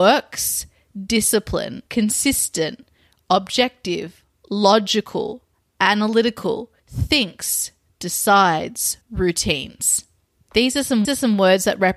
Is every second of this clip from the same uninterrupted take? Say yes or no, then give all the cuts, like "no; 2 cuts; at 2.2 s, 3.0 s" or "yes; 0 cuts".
no; 4 cuts; at 1.9 s, 6.8 s, 9.0 s, 11.0 s